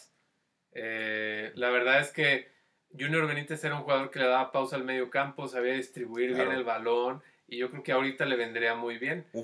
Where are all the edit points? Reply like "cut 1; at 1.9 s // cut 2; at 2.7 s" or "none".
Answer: none